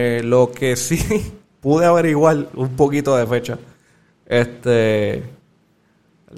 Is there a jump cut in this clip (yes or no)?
no